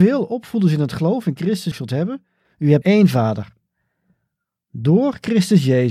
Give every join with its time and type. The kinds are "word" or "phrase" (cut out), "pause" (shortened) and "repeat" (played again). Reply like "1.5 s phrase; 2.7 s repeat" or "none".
1.7 s phrase; 2.8 s word